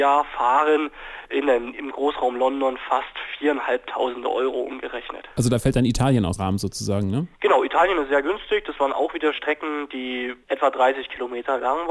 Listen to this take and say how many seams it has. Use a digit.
4